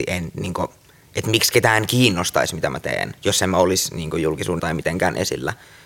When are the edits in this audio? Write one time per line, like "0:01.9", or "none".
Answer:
0:03.2
0:04.6